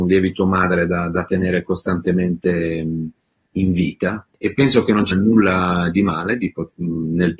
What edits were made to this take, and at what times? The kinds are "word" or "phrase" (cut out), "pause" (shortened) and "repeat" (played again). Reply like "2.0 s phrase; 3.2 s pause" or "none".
5.1 s word